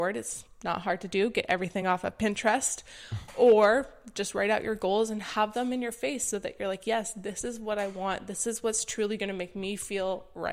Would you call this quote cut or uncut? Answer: uncut